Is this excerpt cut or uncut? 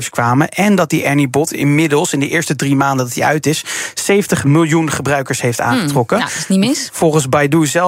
uncut